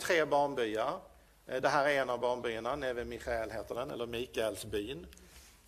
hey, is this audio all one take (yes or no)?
yes